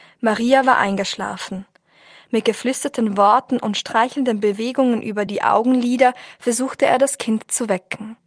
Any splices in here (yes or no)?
no